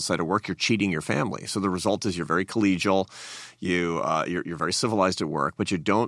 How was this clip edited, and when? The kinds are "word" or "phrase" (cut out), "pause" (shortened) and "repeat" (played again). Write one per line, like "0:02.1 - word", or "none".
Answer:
none